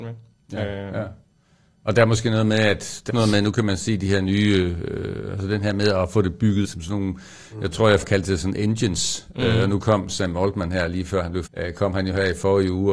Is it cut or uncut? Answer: cut